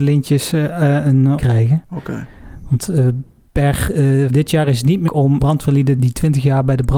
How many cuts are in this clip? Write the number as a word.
five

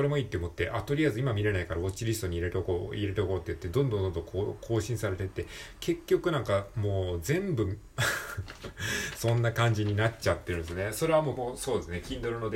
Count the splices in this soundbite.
one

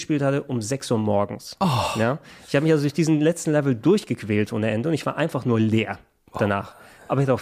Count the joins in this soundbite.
zero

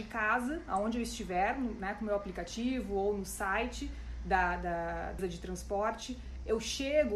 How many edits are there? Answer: one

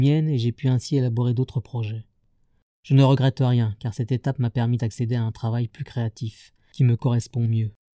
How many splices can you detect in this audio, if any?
zero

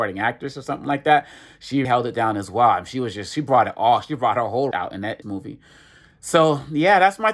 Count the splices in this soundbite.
three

